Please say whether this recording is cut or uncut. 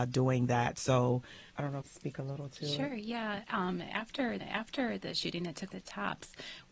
cut